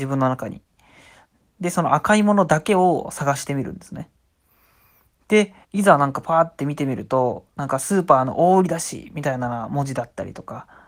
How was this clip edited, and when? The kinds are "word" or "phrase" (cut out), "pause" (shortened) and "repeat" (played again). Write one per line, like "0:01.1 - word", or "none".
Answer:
0:05.6 - pause